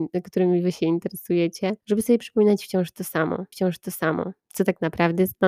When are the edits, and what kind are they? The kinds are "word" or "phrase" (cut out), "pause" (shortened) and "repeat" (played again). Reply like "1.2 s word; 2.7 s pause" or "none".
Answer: 1.8 s pause; 3.5 s repeat